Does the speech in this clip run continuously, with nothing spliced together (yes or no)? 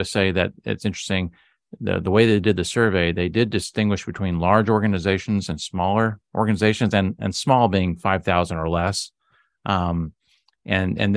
yes